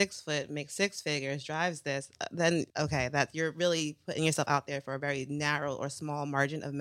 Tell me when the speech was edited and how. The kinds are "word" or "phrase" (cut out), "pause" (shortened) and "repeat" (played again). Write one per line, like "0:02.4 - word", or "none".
0:02.7 - pause